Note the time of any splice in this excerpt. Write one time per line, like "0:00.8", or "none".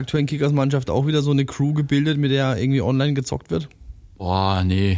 none